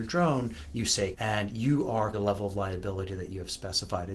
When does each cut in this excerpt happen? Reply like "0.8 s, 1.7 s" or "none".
1.1 s, 2.1 s